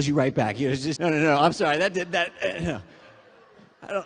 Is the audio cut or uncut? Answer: cut